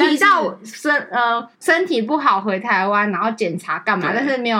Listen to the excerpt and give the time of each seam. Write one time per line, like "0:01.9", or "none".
0:01.5